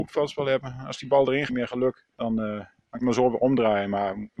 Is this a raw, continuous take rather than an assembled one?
no; 3 cuts; at 1.5 s, 2.1 s, 3.0 s

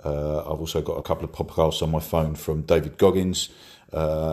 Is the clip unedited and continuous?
no; 1 cut; at 1.0 s

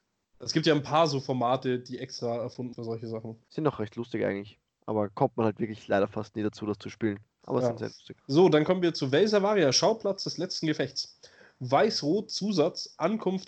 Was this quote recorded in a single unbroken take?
no; 3 cuts; at 2.7 s, 3.4 s, 8.2 s

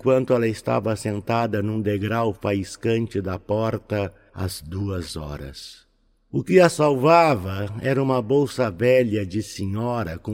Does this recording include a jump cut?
no; 0 cuts

